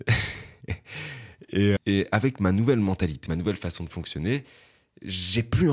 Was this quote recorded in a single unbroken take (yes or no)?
no